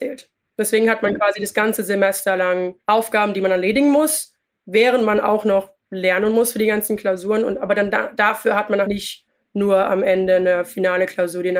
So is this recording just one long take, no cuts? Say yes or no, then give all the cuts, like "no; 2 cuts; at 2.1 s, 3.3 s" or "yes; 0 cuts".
no; 2 cuts; at 2.8 s, 8.8 s